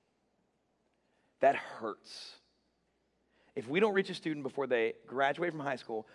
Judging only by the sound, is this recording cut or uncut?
uncut